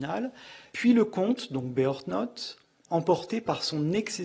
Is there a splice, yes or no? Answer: no